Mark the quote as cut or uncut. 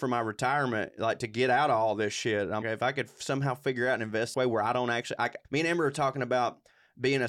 cut